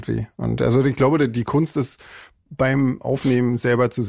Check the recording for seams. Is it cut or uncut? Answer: uncut